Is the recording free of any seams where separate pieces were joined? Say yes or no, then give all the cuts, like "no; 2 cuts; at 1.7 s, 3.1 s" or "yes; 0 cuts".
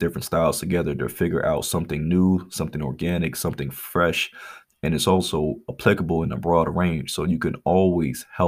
yes; 0 cuts